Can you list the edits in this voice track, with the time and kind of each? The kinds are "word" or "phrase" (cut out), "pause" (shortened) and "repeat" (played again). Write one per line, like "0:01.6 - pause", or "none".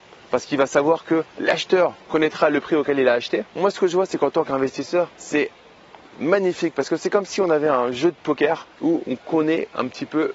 0:02.0 - pause
0:03.5 - pause
0:05.1 - pause
0:08.7 - pause